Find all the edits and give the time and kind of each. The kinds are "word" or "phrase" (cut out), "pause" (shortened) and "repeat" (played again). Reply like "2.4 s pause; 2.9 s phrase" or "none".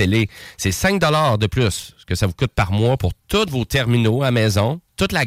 none